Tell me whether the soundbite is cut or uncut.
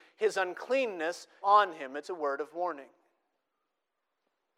cut